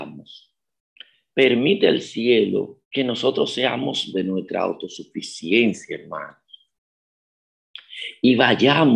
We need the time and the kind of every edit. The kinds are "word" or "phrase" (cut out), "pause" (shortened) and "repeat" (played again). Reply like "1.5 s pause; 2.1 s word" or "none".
2.8 s pause; 4.1 s word

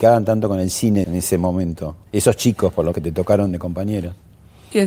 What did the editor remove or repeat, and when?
1.0 s word; 2.1 s pause; 2.9 s word

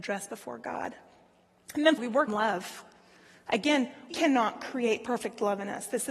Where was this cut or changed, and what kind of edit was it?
2.0 s word; 2.3 s word; 4.1 s word

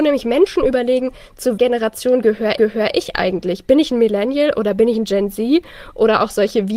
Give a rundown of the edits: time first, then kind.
1.6 s word; 2.6 s repeat

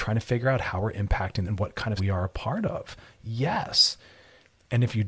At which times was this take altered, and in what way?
1.4 s phrase; 2.0 s word

